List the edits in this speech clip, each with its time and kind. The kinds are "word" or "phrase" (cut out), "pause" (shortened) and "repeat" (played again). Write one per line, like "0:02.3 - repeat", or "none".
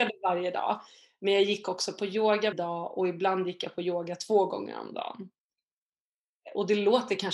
0:02.5 - word